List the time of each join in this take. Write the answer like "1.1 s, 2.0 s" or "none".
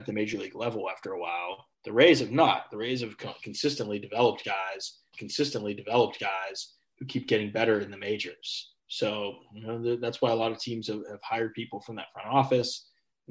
1.7 s, 5.1 s, 8.8 s